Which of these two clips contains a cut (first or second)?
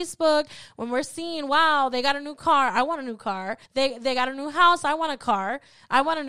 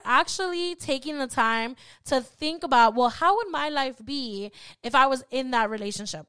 first